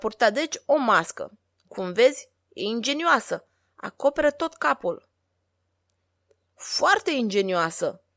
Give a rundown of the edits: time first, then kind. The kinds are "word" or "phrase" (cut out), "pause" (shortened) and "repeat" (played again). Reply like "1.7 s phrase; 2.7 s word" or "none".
none